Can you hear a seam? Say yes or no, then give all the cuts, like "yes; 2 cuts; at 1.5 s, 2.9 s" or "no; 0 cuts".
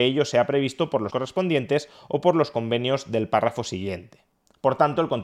yes; 1 cut; at 1.1 s